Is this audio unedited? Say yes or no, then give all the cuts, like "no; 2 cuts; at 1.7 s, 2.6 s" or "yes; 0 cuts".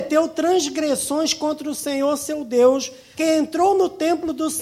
no; 1 cut; at 3.2 s